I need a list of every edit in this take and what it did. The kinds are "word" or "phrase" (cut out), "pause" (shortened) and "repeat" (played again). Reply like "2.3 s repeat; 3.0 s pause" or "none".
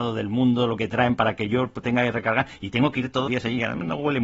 3.3 s word